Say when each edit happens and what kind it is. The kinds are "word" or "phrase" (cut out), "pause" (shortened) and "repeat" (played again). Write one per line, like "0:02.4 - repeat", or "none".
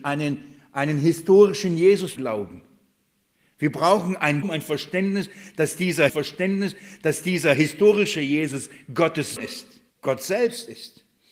0:02.2 - word
0:03.3 - pause
0:04.4 - word
0:06.1 - repeat
0:09.4 - word
0:09.9 - pause